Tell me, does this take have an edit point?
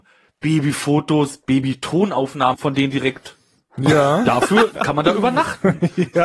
yes; 2 cuts; at 2.5 s, 4.8 s

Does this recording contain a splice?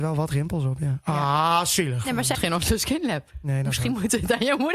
yes; 1 cut; at 2.3 s

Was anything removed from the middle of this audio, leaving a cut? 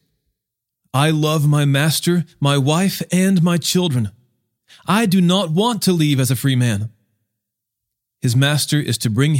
no; 0 cuts

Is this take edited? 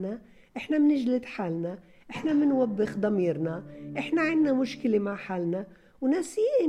no; 0 cuts

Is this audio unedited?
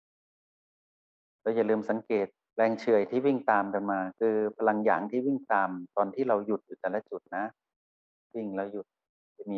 yes; 0 cuts

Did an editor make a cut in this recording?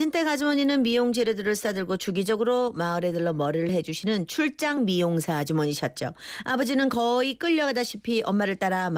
no; 0 cuts

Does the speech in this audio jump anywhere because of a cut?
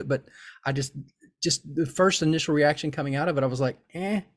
no; 0 cuts

